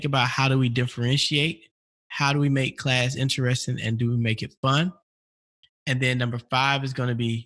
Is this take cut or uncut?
uncut